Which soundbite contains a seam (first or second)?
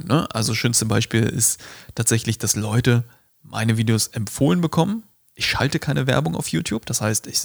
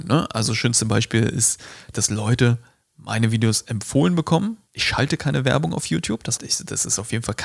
second